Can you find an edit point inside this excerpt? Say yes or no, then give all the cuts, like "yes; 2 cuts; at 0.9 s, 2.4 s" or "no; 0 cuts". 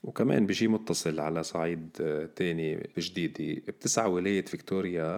yes; 1 cut; at 2.9 s